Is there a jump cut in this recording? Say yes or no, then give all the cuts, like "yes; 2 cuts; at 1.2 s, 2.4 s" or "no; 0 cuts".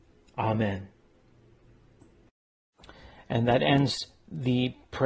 no; 0 cuts